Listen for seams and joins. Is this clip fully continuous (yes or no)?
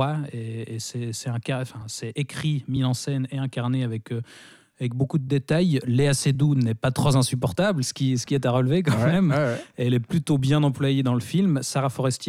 yes